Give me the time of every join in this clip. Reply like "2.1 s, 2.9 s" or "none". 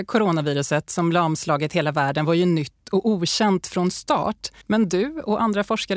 4.6 s